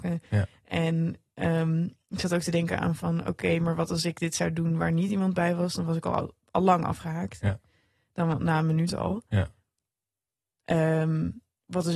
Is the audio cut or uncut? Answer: uncut